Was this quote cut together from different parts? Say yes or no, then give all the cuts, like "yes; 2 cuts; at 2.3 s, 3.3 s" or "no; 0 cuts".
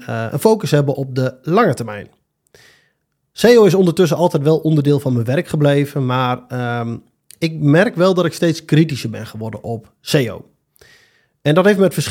no; 0 cuts